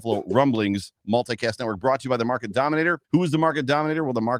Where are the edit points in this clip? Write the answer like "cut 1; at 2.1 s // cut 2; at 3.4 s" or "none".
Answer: cut 1; at 3.0 s